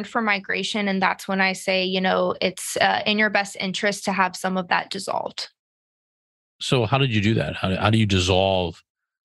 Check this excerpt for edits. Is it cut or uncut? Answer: uncut